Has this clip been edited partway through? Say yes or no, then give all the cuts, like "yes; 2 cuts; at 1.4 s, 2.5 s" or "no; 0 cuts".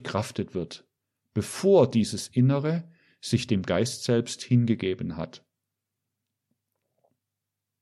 no; 0 cuts